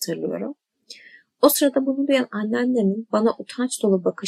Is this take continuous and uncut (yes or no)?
yes